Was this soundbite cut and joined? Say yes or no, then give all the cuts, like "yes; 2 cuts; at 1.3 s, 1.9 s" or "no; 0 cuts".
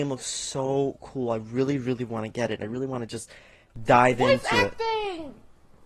no; 0 cuts